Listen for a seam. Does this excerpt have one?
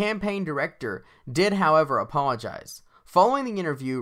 no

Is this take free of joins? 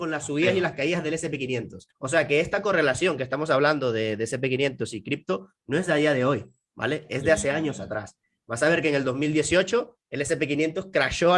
no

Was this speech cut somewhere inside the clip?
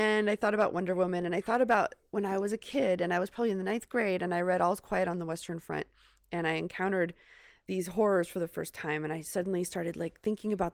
no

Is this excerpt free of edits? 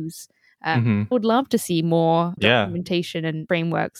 no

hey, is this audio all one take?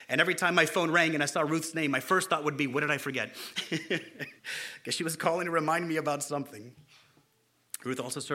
no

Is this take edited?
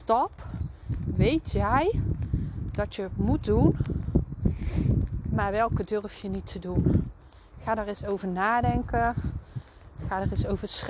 no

